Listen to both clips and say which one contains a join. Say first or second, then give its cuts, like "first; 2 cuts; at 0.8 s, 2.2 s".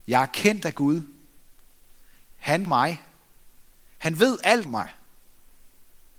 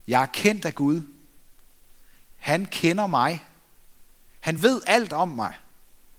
first; 2 cuts; at 2.7 s, 4.6 s